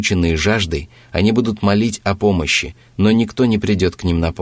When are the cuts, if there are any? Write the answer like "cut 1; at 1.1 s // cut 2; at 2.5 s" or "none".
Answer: none